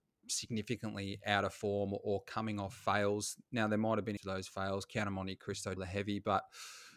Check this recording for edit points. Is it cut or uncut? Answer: cut